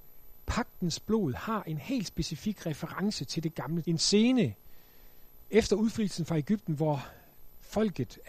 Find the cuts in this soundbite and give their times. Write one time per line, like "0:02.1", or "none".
0:03.8